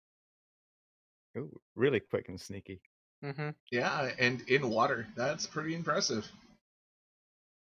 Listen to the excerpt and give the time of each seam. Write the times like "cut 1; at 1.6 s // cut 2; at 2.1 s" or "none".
cut 1; at 3.6 s